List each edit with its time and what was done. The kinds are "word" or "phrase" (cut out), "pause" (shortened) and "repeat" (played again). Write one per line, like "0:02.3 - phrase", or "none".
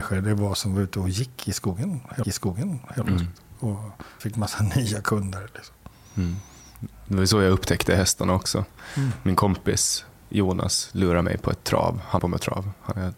0:02.2 - repeat
0:04.2 - word
0:10.2 - pause
0:11.2 - word
0:12.2 - word